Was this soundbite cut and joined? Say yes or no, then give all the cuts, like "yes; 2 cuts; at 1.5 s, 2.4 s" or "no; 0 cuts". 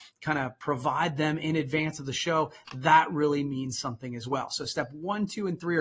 no; 0 cuts